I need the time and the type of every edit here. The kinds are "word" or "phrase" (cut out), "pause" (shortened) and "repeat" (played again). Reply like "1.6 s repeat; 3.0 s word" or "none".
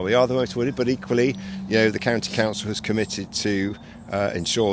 none